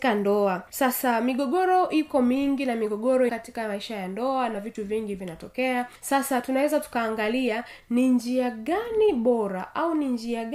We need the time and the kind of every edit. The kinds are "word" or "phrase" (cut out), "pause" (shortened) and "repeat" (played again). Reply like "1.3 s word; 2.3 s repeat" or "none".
3.3 s word